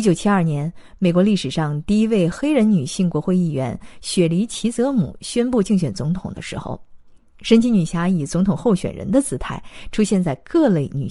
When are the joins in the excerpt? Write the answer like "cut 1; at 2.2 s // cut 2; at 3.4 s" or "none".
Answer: none